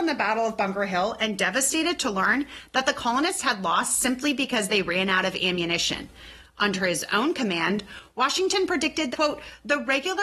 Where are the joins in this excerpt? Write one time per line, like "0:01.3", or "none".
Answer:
0:09.1